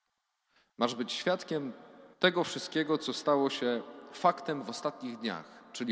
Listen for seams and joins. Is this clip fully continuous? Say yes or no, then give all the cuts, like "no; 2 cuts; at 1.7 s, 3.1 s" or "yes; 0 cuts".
no; 1 cut; at 2.1 s